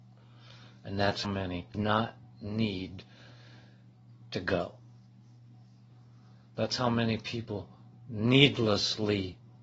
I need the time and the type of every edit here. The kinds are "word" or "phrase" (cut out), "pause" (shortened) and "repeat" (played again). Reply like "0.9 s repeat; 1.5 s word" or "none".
1.2 s word; 1.7 s phrase